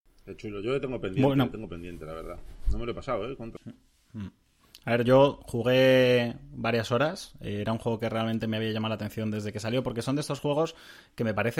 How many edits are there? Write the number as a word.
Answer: zero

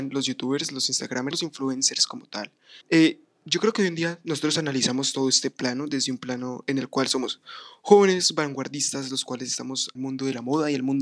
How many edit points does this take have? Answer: three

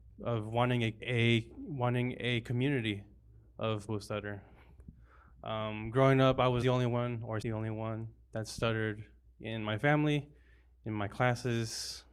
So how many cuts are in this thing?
four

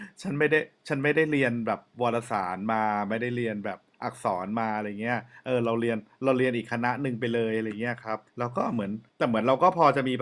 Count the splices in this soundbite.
two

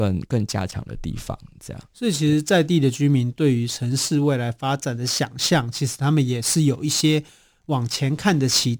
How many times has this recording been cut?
zero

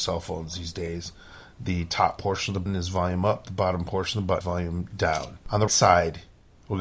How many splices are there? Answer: three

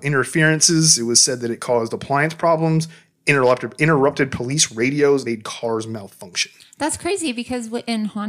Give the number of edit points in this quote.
one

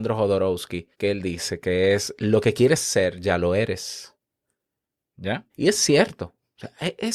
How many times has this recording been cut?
two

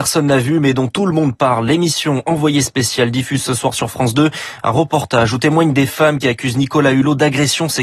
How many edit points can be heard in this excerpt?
zero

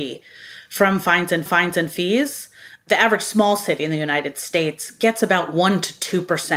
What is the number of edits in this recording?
one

